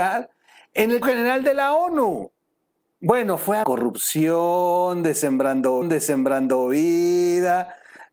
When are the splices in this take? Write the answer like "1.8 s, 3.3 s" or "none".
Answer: 1.0 s, 2.8 s, 3.6 s, 5.8 s

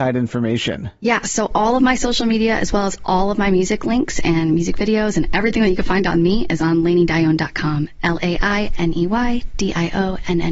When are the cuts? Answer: none

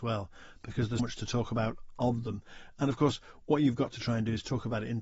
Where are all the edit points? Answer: 1.0 s

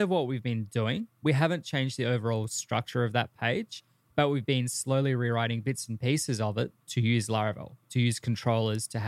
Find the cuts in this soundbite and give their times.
none

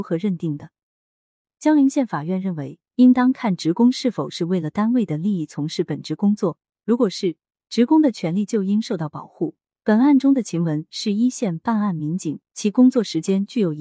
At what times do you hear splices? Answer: none

